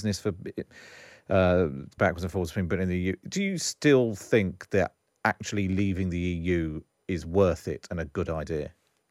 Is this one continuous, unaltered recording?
no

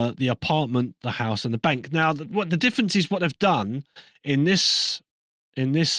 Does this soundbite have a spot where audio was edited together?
no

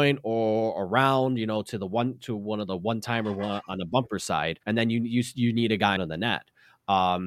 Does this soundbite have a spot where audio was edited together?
yes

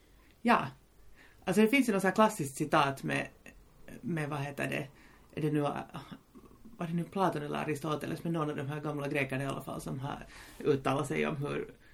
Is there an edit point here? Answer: no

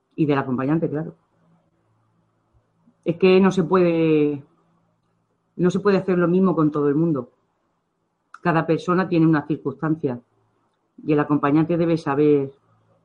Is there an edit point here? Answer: no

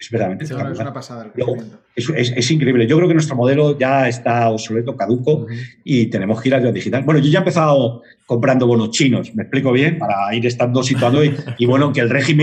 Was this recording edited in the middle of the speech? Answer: no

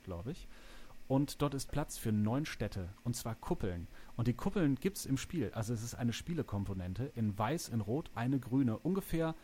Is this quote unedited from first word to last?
no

